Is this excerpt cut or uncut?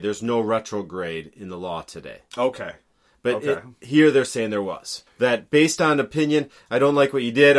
cut